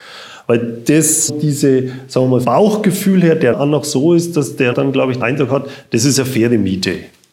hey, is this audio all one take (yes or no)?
no